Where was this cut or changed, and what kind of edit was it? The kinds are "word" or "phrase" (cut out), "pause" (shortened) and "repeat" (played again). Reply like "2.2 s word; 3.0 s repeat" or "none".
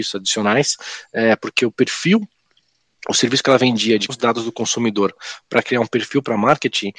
4.1 s word